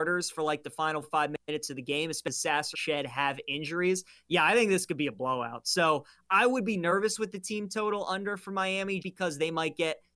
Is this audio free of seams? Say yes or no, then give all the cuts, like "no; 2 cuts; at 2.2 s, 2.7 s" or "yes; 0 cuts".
no; 3 cuts; at 1.0 s, 2.7 s, 9.0 s